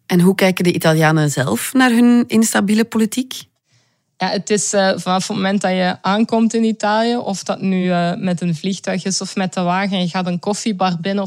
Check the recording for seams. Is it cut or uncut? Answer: uncut